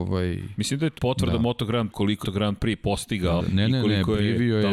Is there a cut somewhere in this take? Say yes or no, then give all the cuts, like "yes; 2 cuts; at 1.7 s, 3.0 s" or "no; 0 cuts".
yes; 4 cuts; at 1.0 s, 1.9 s, 2.2 s, 3.4 s